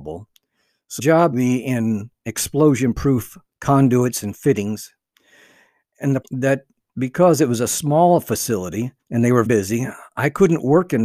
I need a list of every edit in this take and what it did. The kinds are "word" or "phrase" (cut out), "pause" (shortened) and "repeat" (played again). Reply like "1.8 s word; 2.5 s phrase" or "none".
1.0 s word; 1.3 s phrase; 3.5 s pause; 6.2 s phrase; 9.0 s pause; 9.5 s word